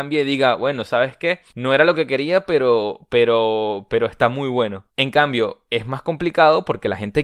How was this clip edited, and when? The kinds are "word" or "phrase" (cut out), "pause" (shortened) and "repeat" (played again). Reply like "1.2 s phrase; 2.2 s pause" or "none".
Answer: 1.5 s pause; 4.9 s pause